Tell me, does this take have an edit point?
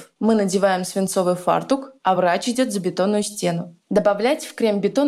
no; 0 cuts

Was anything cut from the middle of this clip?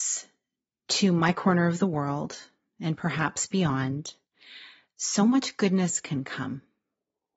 no; 0 cuts

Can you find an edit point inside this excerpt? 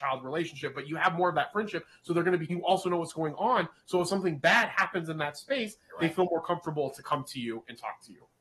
yes; 1 cut; at 2.5 s

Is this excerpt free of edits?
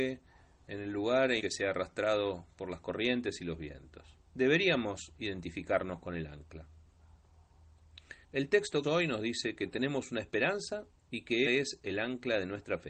no; 6 cuts; at 1.4 s, 4.3 s, 8.2 s, 8.8 s, 11.0 s, 11.5 s

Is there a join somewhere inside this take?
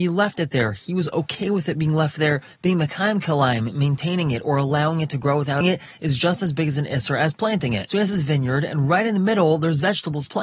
yes; 1 cut; at 5.6 s

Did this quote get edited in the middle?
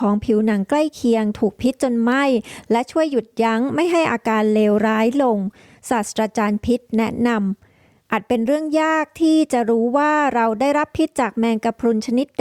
no; 0 cuts

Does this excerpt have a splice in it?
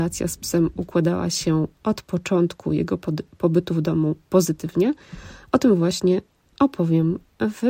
no; 0 cuts

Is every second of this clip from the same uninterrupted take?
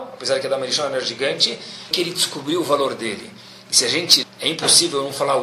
no; 2 cuts; at 1.9 s, 4.2 s

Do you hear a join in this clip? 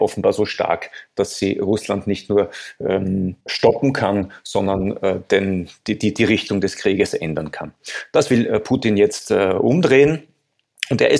yes; 1 cut; at 3.4 s

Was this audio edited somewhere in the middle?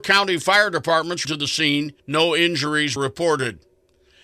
yes; 3 cuts; at 1.2 s, 2.0 s, 3.0 s

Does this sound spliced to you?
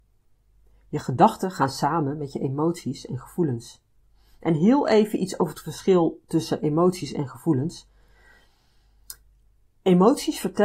no; 0 cuts

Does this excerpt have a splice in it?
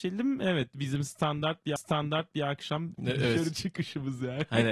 yes; 2 cuts; at 1.8 s, 3.0 s

